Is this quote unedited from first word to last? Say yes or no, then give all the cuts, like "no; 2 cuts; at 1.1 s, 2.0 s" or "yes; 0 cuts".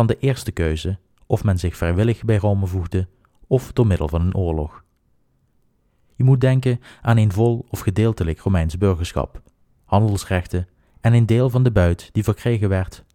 yes; 0 cuts